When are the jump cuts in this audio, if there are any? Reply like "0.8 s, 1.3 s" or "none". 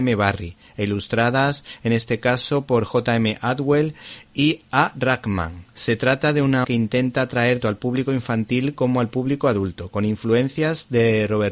5.7 s, 6.6 s, 7.6 s